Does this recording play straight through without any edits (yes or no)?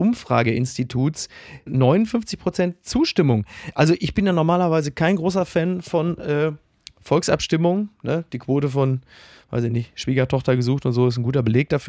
yes